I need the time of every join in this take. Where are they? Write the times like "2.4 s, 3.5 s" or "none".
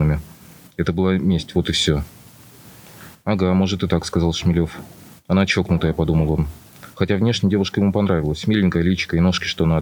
none